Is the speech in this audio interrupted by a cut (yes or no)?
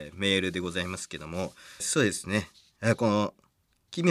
yes